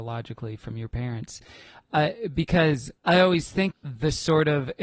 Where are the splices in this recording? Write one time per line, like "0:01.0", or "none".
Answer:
0:03.0
0:03.7